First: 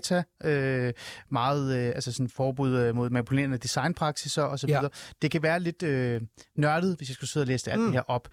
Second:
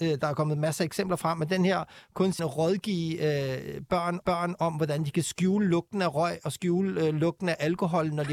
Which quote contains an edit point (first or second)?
second